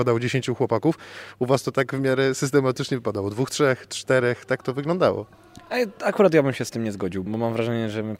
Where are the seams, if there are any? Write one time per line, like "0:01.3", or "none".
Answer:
0:07.3